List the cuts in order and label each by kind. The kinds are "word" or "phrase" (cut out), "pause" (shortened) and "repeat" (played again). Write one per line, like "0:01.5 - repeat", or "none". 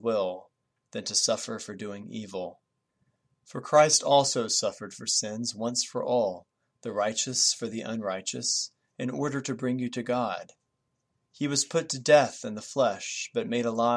none